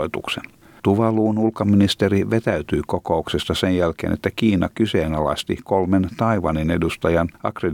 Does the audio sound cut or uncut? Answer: uncut